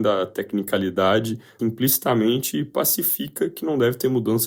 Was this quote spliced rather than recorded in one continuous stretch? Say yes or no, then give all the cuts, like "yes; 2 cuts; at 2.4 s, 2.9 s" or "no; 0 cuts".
yes; 1 cut; at 1.6 s